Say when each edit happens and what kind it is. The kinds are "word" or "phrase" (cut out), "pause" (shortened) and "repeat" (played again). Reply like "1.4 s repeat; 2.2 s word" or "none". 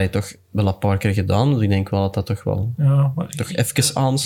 none